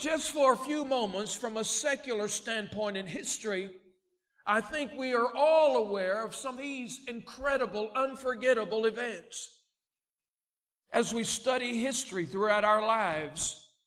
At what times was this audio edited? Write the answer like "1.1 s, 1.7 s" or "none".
6.5 s